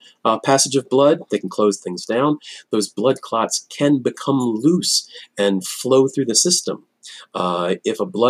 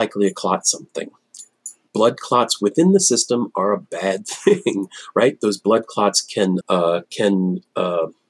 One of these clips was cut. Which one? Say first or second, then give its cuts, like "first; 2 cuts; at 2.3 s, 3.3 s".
second; 1 cut; at 6.6 s